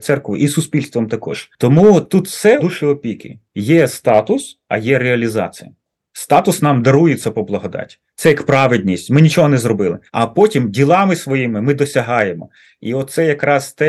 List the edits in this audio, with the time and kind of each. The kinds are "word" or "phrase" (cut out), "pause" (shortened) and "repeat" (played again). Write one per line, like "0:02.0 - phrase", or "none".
0:02.6 - phrase
0:07.3 - word
0:10.1 - pause

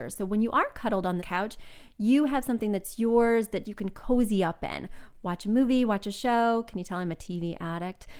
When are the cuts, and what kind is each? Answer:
0:01.2 - phrase
0:03.6 - word

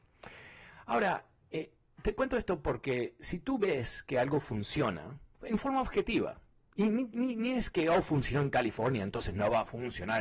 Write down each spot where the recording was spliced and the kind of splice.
none

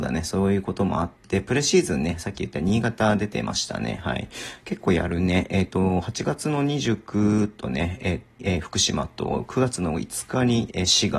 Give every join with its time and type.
0:08.4 - word

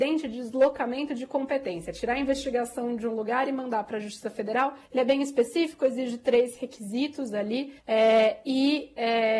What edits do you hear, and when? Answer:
0:04.9 - pause
0:07.8 - pause

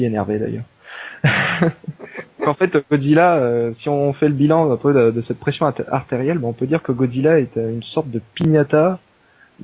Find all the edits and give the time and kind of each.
0:02.0 - pause

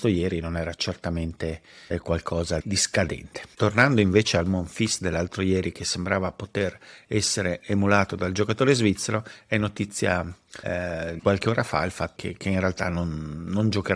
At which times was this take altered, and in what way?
0:02.6 - word
0:11.2 - word
0:12.2 - word

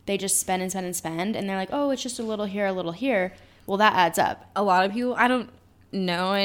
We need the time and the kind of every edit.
none

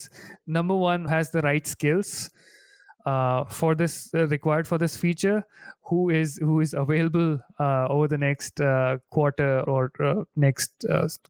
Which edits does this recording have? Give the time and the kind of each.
0:01.1 - word
0:09.7 - word

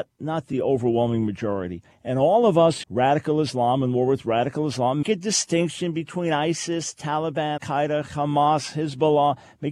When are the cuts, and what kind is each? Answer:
0:01.9 - pause
0:02.8 - phrase
0:05.0 - word
0:07.6 - word

